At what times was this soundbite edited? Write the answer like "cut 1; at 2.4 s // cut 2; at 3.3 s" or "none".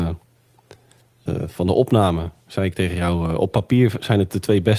none